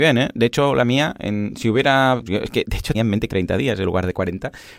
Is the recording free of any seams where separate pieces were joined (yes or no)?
no